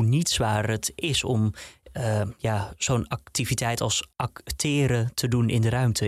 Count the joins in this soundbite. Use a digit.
1